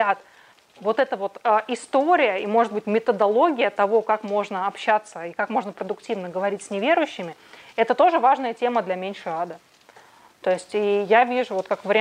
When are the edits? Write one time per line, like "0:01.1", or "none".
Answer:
none

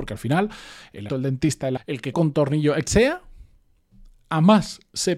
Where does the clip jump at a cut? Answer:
0:01.1
0:01.8
0:02.1
0:02.9

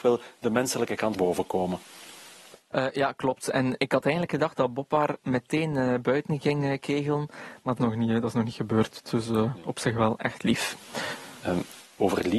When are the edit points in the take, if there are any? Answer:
0:01.1
0:03.8
0:07.8

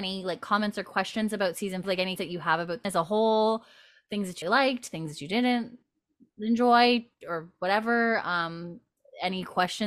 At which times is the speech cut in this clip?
0:01.8
0:02.2
0:02.8
0:04.4

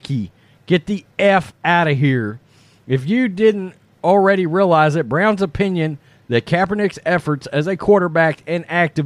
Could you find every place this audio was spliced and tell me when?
none

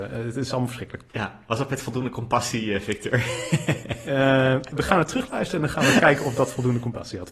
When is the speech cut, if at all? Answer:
0:01.1

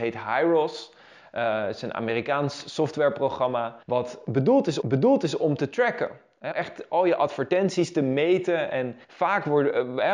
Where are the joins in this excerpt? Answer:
0:03.8
0:04.8
0:06.5
0:09.0

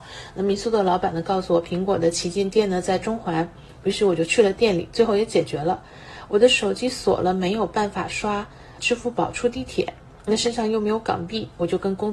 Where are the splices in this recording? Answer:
0:08.8

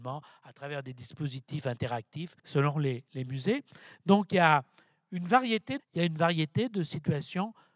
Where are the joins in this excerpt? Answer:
0:02.4
0:05.8

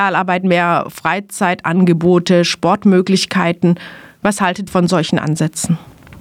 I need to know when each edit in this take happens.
0:04.7

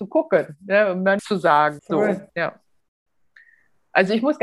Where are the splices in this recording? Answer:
0:01.2
0:01.8
0:02.3

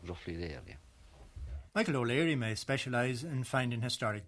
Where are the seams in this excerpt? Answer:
0:01.7

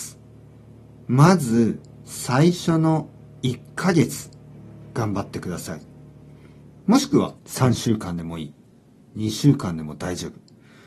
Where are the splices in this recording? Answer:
0:07.4

